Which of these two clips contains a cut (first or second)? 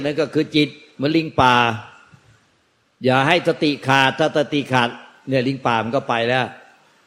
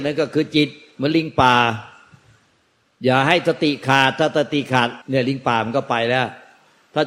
second